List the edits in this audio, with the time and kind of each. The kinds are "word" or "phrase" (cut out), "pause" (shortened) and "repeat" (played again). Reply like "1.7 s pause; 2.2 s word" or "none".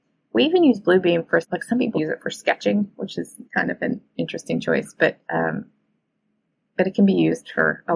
1.4 s word; 1.9 s word; 3.5 s pause; 5.2 s pause